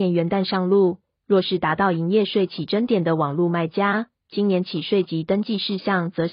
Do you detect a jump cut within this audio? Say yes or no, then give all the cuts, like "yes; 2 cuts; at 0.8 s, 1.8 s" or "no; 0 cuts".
no; 0 cuts